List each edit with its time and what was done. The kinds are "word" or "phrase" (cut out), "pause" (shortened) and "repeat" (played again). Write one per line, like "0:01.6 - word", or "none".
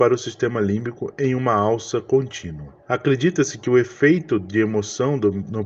0:02.8 - pause